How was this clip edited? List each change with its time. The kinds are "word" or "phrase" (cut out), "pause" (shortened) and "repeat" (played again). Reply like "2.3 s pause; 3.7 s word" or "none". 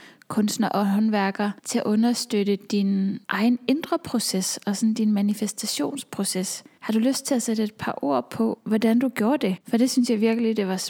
1.6 s pause; 3.2 s pause; 9.6 s pause